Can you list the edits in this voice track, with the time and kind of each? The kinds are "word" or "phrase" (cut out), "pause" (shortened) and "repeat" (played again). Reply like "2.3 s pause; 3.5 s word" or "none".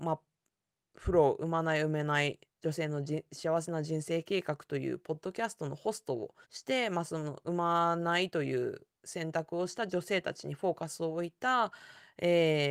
6.4 s pause